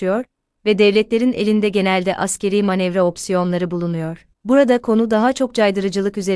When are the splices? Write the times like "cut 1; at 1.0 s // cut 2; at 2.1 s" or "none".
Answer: cut 1; at 4.3 s